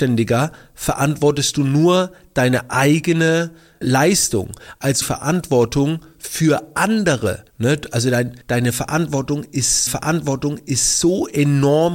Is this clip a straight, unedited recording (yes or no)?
no